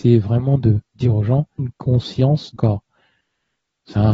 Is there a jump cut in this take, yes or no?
yes